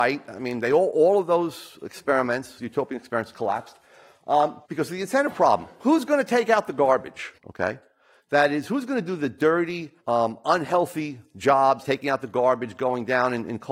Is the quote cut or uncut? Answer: cut